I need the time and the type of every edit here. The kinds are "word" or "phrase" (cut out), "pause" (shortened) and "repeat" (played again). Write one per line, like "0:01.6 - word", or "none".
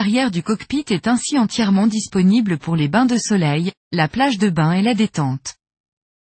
none